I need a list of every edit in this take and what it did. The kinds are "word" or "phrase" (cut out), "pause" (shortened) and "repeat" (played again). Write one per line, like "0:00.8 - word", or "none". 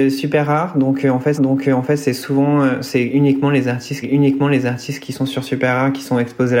0:01.3 - repeat
0:04.0 - repeat